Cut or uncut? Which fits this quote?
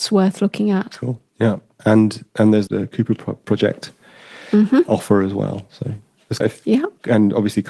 cut